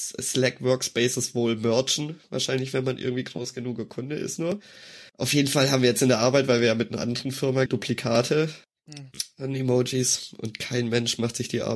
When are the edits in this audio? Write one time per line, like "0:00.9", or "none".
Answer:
0:05.1
0:07.7
0:08.6